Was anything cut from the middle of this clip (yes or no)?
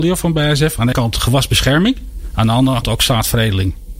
yes